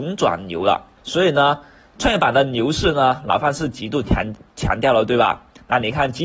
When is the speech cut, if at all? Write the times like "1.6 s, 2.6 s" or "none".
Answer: 1.0 s